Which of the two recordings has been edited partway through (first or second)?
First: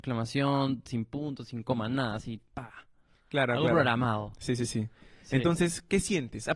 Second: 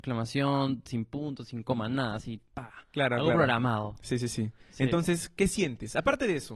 second